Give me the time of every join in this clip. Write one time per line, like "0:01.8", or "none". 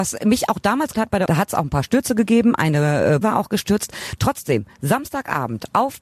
0:00.9
0:01.3
0:03.2